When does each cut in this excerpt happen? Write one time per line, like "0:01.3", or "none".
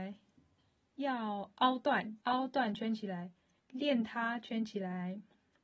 0:02.2
0:03.6